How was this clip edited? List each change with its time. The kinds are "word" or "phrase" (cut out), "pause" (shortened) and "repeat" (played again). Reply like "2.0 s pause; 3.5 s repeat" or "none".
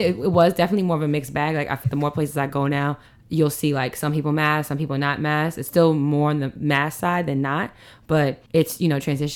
1.8 s word; 3.1 s pause; 8.5 s pause